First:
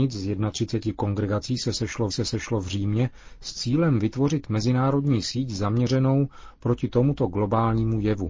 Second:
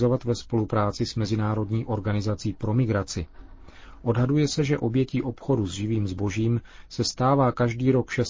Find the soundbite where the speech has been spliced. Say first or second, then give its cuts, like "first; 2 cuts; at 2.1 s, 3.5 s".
first; 1 cut; at 2.1 s